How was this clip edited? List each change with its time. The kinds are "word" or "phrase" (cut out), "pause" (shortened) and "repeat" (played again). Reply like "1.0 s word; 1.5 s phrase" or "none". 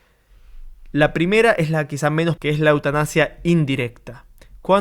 2.4 s word